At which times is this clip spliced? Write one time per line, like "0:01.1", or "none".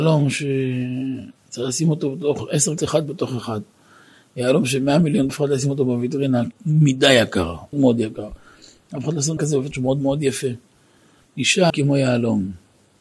0:02.8
0:05.3
0:06.5
0:07.7
0:09.4
0:09.7
0:11.7